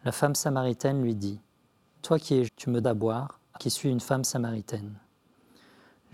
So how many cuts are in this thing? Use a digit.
4